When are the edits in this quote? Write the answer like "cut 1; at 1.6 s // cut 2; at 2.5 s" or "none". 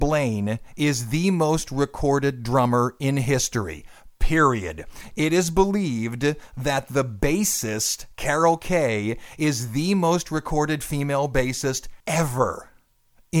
cut 1; at 12.0 s